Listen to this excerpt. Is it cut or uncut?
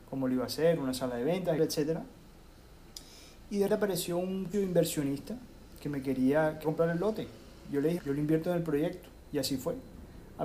cut